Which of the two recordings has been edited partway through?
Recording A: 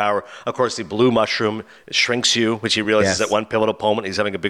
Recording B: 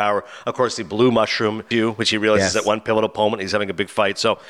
B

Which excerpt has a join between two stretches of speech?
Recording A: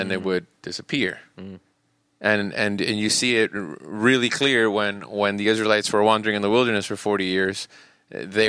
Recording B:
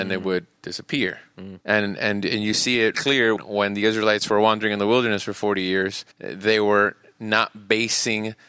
B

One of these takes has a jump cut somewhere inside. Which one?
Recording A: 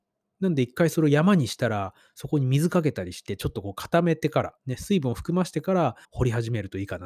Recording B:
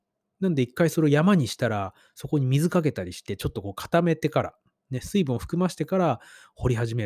A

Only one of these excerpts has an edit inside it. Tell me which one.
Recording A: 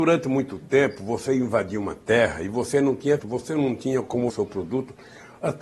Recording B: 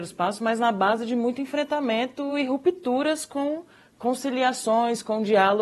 A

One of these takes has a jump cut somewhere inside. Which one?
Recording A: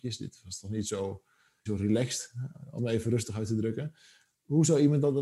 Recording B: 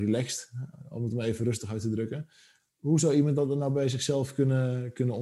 A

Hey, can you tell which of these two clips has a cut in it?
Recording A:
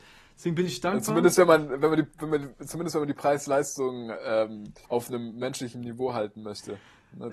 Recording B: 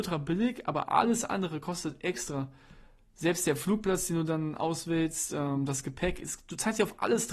A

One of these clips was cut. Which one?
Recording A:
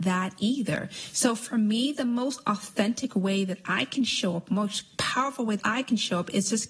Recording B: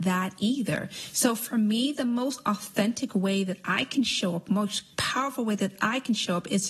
A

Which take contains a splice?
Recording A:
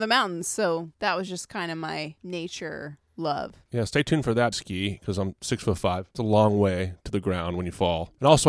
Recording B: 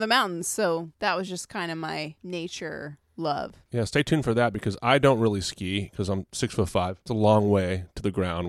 A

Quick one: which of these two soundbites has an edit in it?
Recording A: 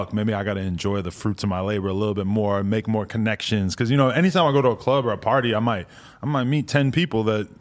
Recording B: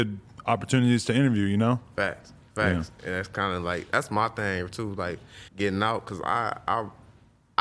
B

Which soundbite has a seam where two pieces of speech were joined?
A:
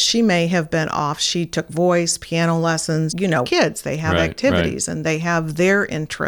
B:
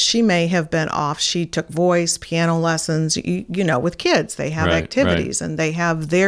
A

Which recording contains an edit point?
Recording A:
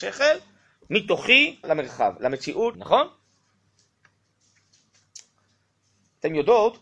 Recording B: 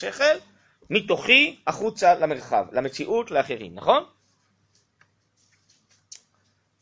A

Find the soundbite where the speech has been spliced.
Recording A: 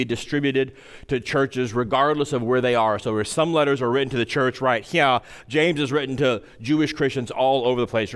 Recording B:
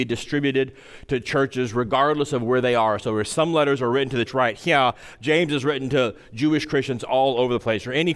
B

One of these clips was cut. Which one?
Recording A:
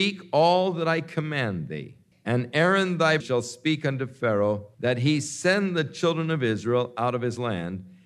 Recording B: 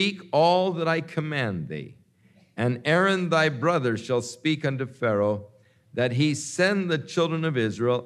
A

